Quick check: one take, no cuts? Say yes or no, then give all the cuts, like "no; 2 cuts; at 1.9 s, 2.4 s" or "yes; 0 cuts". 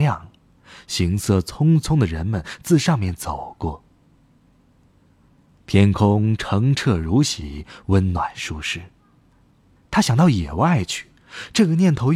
yes; 0 cuts